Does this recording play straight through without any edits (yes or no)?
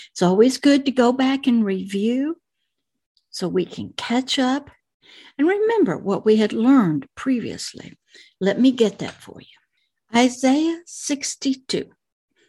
yes